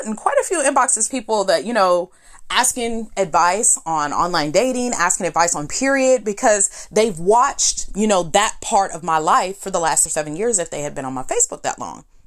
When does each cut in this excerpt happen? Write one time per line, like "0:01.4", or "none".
0:01.1
0:05.7
0:10.1

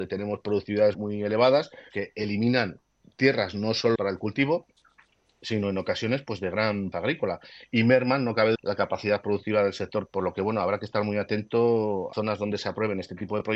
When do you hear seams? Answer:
0:00.9
0:01.9
0:04.0
0:06.9
0:08.5
0:10.1
0:12.1

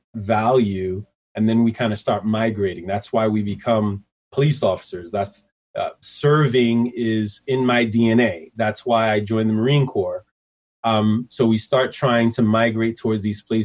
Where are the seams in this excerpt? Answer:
none

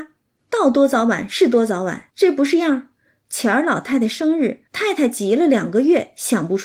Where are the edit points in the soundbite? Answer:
0:02.1
0:04.7

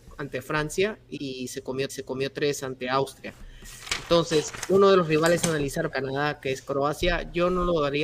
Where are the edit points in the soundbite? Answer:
0:01.2
0:01.9
0:05.9

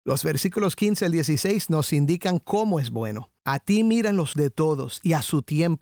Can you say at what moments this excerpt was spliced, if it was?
0:03.4
0:04.3

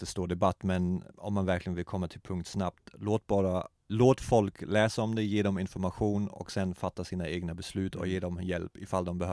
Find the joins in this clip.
0:01.1
0:03.8

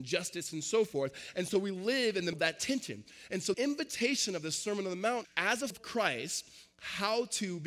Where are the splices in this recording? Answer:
0:02.3
0:03.5
0:05.2
0:05.7

